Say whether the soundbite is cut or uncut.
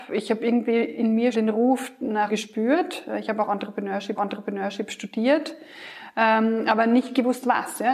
cut